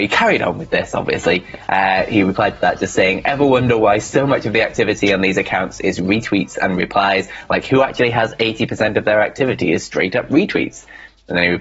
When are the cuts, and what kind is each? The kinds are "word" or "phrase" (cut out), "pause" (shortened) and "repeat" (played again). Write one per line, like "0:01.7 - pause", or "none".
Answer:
none